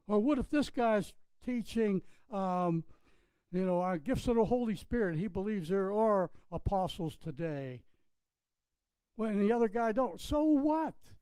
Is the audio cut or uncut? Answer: uncut